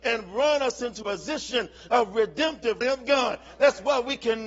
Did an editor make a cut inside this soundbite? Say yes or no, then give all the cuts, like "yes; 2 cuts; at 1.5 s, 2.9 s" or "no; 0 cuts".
yes; 2 cuts; at 1.0 s, 2.8 s